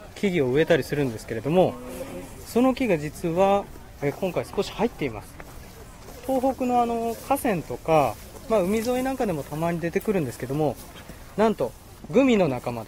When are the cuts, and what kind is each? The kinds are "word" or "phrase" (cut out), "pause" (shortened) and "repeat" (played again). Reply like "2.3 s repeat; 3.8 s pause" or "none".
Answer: none

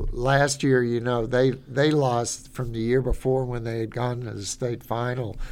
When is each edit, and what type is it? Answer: none

